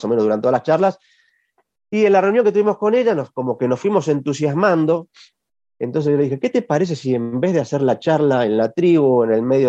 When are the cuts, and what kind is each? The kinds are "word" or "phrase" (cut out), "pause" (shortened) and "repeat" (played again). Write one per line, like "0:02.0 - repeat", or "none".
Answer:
none